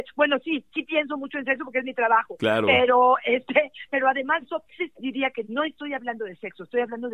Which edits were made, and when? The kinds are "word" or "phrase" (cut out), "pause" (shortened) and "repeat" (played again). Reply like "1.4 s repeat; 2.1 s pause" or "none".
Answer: 3.9 s word; 4.4 s word; 4.8 s word; 5.4 s phrase